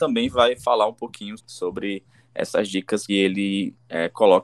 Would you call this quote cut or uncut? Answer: cut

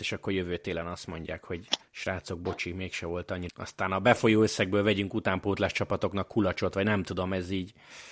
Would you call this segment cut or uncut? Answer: cut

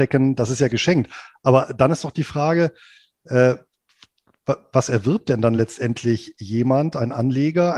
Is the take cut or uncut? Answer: uncut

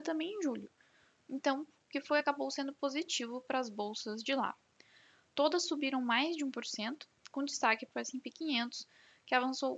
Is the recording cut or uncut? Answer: uncut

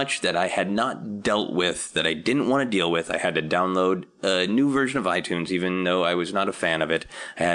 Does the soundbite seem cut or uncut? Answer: uncut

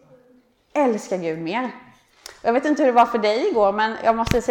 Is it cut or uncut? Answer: uncut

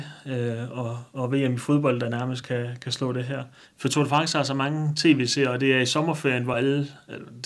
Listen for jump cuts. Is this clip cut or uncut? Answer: uncut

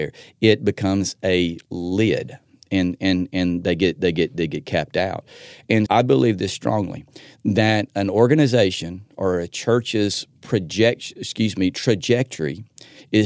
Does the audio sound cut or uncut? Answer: cut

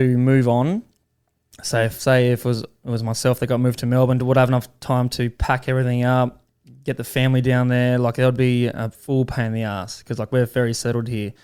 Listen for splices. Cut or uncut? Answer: uncut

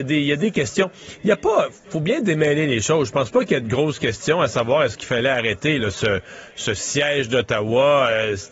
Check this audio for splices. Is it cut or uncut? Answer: uncut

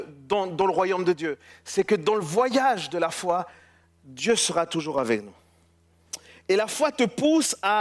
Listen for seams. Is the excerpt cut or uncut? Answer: uncut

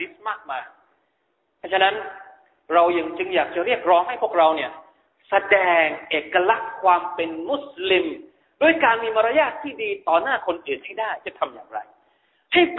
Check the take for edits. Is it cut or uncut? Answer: uncut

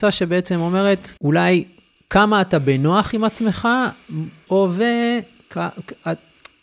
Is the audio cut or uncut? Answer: cut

